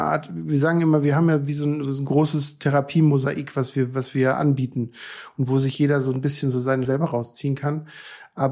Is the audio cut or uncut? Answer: cut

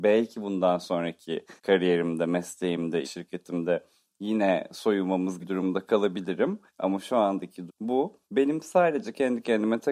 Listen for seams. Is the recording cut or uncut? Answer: cut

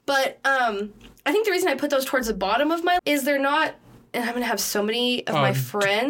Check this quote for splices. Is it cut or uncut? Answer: cut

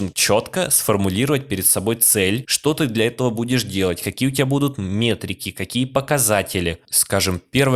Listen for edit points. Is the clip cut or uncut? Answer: uncut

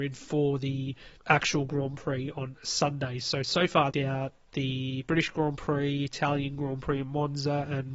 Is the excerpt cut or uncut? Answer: cut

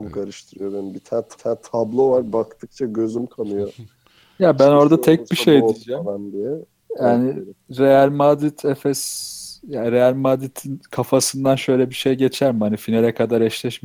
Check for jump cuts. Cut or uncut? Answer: cut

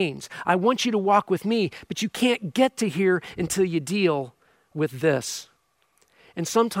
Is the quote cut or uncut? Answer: uncut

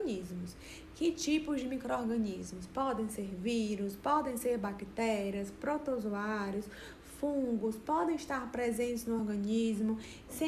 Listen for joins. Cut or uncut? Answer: uncut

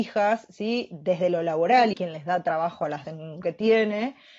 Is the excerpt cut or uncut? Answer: cut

